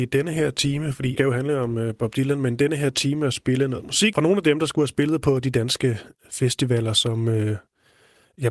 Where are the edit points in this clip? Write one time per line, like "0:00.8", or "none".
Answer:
0:01.2